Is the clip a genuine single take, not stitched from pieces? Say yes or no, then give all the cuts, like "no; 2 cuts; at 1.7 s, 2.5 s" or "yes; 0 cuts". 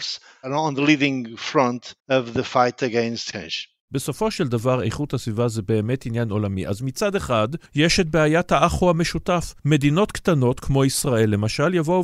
no; 4 cuts; at 2.0 s, 3.3 s, 7.7 s, 9.6 s